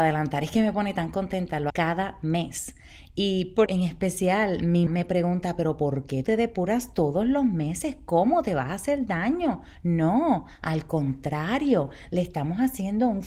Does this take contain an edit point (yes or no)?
yes